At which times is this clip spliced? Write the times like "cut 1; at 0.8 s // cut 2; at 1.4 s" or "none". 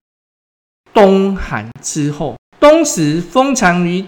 cut 1; at 2.5 s